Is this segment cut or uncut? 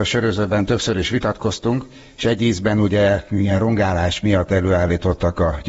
uncut